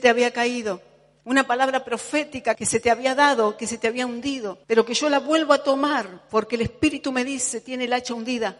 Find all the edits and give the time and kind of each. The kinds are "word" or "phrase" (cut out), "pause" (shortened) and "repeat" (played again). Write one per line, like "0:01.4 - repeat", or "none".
0:04.6 - pause

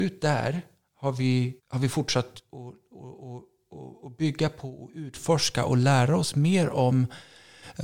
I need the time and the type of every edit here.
0:01.6 - pause

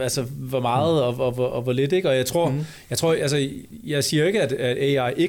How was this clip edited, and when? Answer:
none

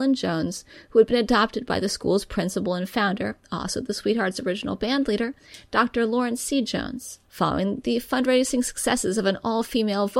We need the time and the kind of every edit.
0:07.2 - pause

